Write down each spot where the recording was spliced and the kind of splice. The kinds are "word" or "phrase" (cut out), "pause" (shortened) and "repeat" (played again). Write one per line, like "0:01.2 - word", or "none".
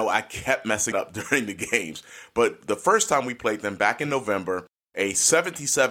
0:00.9 - word